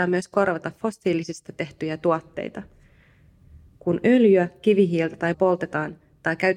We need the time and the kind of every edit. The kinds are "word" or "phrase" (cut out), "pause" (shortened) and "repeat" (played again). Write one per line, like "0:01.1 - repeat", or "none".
0:01.5 - word
0:05.3 - word